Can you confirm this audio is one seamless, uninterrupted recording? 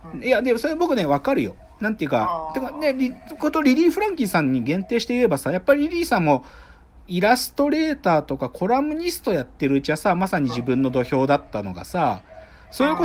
yes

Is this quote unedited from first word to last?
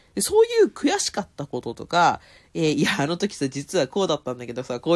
yes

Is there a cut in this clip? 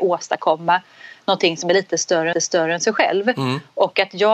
yes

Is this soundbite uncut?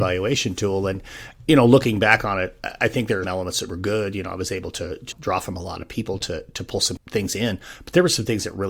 no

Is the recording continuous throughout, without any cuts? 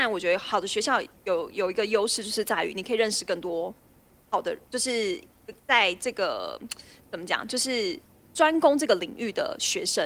yes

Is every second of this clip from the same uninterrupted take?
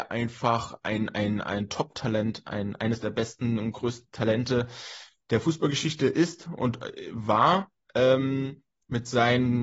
yes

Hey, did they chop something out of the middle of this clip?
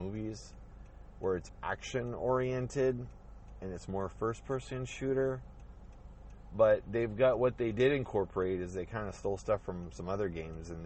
yes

